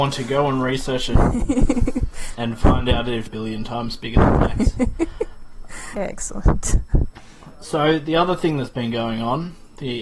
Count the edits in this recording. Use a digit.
3